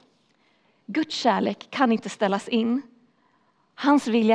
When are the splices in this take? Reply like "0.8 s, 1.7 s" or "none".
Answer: none